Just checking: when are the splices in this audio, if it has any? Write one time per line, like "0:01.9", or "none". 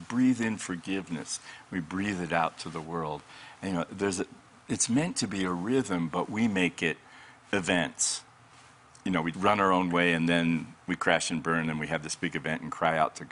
0:09.3